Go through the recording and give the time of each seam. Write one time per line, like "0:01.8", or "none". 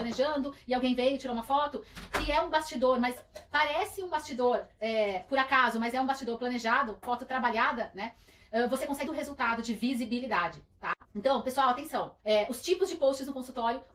0:07.0
0:09.1
0:11.0
0:12.2